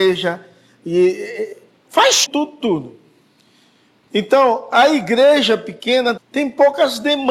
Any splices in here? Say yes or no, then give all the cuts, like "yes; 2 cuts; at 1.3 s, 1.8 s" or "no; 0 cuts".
yes; 2 cuts; at 2.3 s, 6.2 s